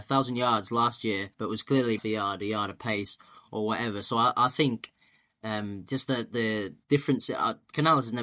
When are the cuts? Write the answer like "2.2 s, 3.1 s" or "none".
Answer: 1.3 s, 2.0 s, 6.8 s